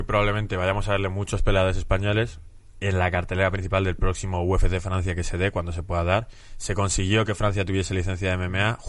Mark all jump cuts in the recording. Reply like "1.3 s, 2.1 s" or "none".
none